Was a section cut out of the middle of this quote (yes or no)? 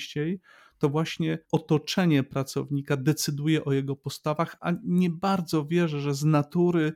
yes